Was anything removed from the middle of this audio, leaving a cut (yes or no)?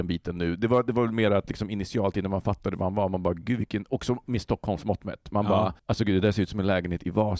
yes